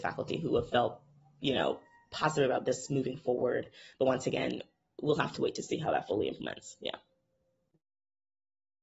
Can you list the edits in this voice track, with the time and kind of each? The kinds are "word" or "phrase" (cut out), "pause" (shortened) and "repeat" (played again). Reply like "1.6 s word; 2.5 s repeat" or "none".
none